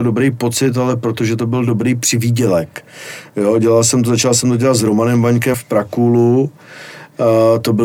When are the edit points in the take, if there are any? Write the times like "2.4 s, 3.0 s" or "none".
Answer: 5.5 s

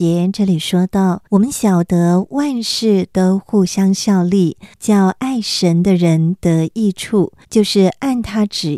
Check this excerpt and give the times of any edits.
1.3 s, 4.7 s, 7.4 s

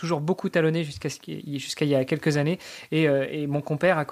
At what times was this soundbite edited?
none

